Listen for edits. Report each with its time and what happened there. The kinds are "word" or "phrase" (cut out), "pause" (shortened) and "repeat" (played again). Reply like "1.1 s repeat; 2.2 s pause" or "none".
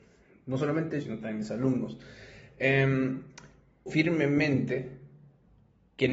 1.0 s word; 3.9 s word